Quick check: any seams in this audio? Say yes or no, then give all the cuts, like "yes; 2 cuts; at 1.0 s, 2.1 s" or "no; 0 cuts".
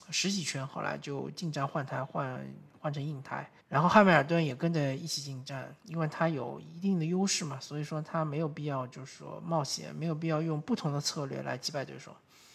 yes; 2 cuts; at 3.6 s, 5.8 s